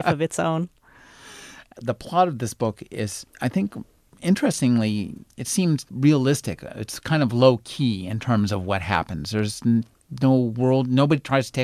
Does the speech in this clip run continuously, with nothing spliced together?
yes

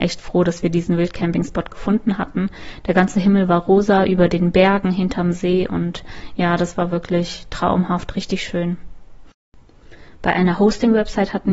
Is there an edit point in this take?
no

